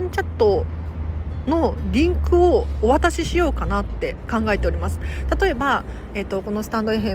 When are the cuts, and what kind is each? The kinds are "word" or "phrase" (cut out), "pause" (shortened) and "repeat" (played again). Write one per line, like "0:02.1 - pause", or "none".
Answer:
none